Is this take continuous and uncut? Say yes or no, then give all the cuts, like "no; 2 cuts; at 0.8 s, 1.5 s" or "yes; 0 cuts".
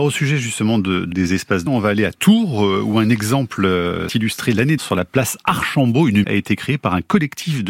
no; 5 cuts; at 1.1 s, 1.7 s, 4.1 s, 4.8 s, 6.2 s